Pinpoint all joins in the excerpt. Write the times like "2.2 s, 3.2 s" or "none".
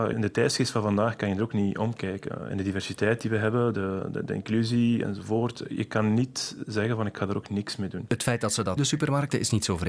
8.8 s